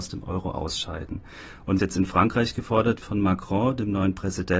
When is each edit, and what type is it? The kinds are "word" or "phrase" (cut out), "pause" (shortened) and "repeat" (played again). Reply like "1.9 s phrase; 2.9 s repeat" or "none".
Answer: 1.8 s word; 3.0 s word